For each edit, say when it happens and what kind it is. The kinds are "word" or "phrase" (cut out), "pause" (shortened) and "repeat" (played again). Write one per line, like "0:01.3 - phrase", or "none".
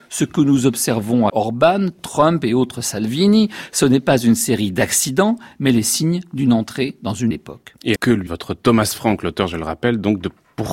0:01.3 - phrase
0:07.3 - word
0:08.0 - word
0:08.3 - word